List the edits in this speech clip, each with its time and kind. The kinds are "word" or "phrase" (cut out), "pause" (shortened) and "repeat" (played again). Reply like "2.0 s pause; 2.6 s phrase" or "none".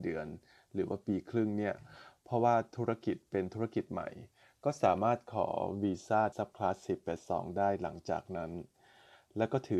6.3 s word